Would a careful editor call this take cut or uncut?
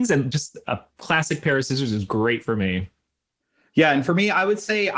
uncut